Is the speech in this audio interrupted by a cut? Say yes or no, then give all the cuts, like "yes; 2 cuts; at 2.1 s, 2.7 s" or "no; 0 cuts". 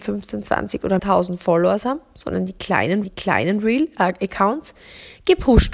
yes; 2 cuts; at 1.0 s, 3.0 s